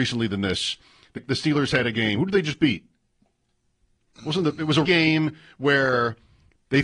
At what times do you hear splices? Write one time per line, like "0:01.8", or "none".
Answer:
0:01.2
0:04.8

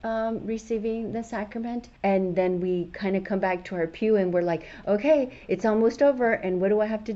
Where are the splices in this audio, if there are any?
0:02.0

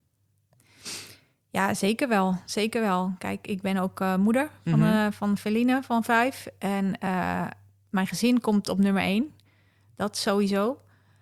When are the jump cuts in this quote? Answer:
none

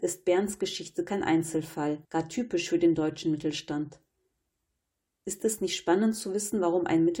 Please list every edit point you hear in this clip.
0:02.0

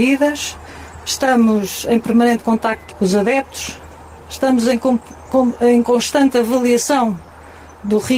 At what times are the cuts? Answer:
none

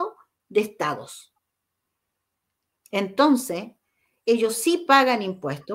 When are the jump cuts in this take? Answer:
none

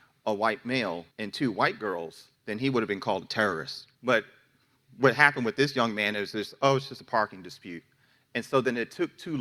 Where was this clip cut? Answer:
0:01.1
0:02.4
0:03.9

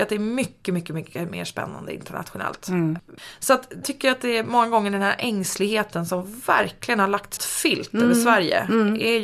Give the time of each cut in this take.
0:03.8
0:07.4

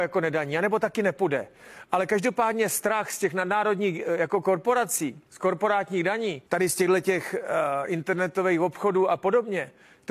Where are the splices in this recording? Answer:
0:05.3
0:06.5

